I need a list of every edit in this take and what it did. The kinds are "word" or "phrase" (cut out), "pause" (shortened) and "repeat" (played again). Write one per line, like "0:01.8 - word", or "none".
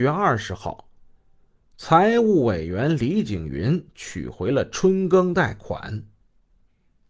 none